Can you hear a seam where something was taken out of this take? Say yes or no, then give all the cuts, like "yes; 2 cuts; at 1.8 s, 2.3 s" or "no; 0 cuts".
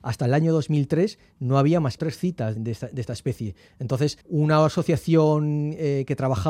yes; 3 cuts; at 2.0 s, 2.6 s, 4.2 s